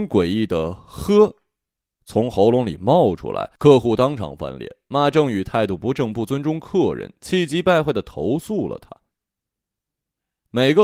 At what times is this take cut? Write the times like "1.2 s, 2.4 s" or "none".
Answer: 3.6 s